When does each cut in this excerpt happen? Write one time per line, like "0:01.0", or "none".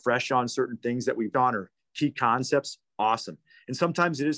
0:01.3